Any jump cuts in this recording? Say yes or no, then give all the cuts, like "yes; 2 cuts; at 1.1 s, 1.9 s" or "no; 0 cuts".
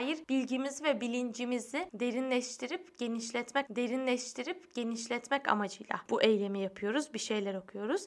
yes; 1 cut; at 3.7 s